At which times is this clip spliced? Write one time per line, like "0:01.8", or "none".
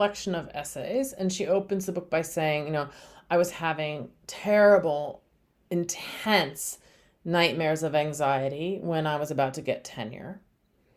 none